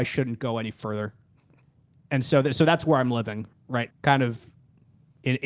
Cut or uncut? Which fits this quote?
cut